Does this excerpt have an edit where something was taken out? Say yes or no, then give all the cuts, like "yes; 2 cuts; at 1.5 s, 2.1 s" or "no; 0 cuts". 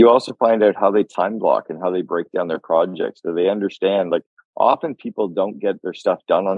no; 0 cuts